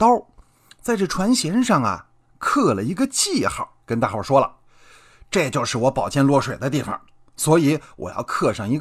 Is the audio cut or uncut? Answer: cut